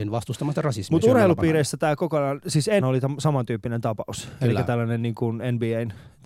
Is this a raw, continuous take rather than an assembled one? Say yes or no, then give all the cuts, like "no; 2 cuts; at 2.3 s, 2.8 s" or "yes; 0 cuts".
no; 1 cut; at 2.8 s